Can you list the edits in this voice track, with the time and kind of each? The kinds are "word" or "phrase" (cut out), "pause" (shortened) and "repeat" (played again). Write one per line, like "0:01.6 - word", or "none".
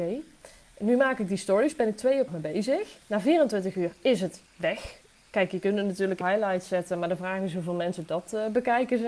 0:02.3 - word
0:03.0 - pause
0:04.5 - pause
0:06.2 - word